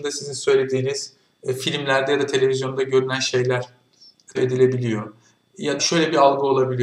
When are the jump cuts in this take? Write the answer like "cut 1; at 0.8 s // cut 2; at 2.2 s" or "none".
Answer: cut 1; at 4.4 s // cut 2; at 5.8 s